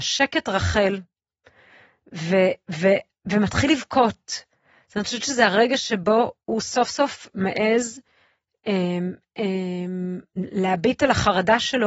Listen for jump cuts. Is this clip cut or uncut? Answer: uncut